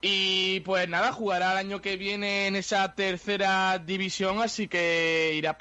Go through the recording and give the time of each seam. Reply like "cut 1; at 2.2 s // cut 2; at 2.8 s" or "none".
none